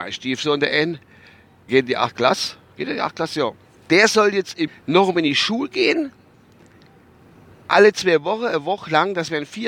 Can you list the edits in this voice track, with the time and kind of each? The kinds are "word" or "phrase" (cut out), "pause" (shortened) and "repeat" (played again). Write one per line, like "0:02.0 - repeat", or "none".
0:01.7 - word
0:04.7 - word

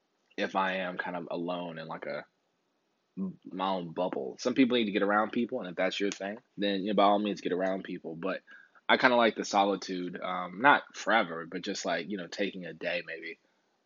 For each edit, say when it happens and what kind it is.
0:03.5 - word
0:06.5 - pause

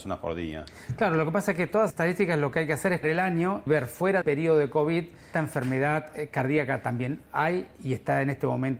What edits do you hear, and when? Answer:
0:01.9 - word
0:03.0 - word
0:03.7 - word
0:04.2 - word
0:05.3 - word
0:07.8 - word

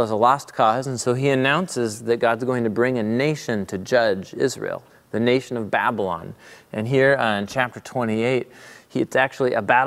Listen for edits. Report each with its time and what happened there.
none

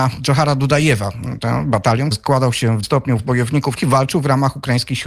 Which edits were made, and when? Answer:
0:02.1 - word
0:02.8 - word
0:03.2 - word
0:03.8 - word

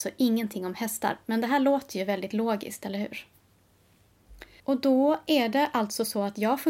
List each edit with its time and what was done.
0:04.6 - pause

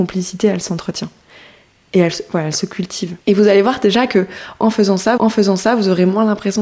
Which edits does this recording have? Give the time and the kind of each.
0:03.2 - pause
0:05.2 - repeat

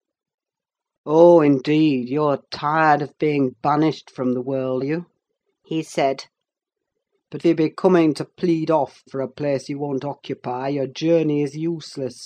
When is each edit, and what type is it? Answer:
0:04.8 - word
0:07.4 - word
0:09.1 - word

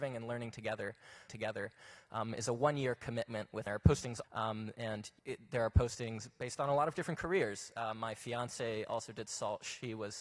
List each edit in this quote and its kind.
0:01.3 - repeat
0:03.7 - phrase
0:04.2 - phrase
0:05.2 - pause

